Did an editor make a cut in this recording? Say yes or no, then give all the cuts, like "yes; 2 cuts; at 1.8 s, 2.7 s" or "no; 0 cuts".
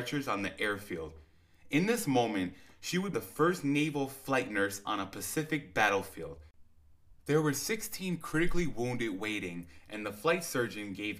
yes; 2 cuts; at 3.1 s, 7.2 s